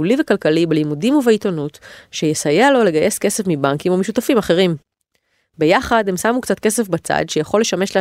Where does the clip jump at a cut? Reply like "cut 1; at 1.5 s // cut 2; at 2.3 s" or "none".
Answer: none

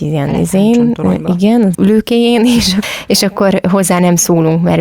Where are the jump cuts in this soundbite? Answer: cut 1; at 1.7 s // cut 2; at 2.8 s

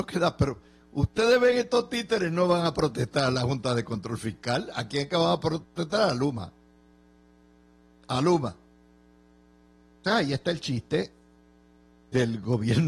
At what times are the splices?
cut 1; at 10.0 s

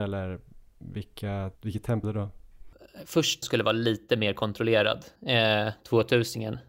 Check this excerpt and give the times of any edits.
cut 1; at 1.6 s // cut 2; at 2.0 s // cut 3; at 3.4 s // cut 4; at 5.2 s

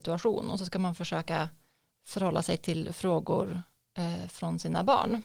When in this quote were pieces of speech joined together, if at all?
none

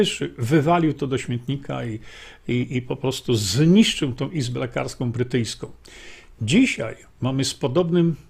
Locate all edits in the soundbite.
none

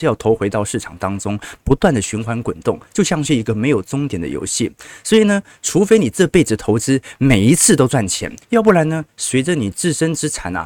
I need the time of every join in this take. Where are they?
cut 1; at 8.4 s

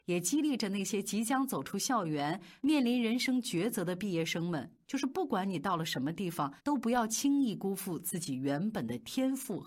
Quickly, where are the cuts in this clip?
cut 1; at 6.6 s

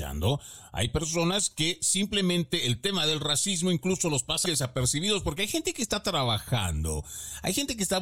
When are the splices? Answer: cut 1; at 4.5 s

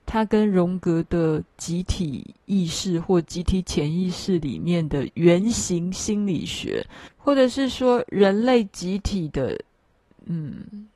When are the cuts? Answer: cut 1; at 7.1 s

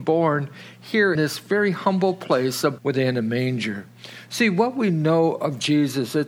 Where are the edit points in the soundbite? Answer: cut 1; at 1.2 s // cut 2; at 2.8 s

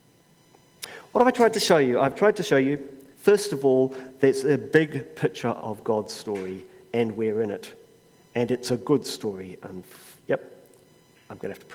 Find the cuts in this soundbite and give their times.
cut 1; at 3.1 s // cut 2; at 10.2 s

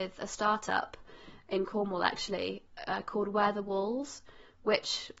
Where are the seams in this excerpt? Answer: none

